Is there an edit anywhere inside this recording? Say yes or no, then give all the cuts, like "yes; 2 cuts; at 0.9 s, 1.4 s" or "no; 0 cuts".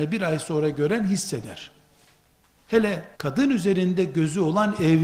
yes; 1 cut; at 3.1 s